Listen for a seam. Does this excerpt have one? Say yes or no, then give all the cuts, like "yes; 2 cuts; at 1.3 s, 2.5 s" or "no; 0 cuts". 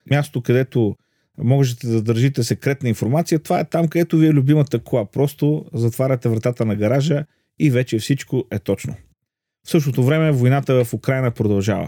no; 0 cuts